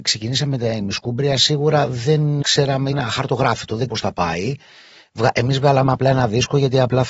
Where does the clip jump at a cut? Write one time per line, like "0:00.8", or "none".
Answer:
0:02.4
0:02.9
0:03.9